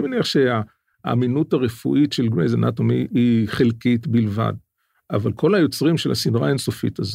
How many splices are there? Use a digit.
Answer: 0